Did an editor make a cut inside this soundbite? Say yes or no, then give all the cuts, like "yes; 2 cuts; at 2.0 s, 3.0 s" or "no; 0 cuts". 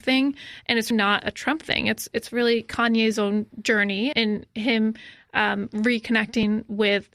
yes; 2 cuts; at 0.9 s, 4.1 s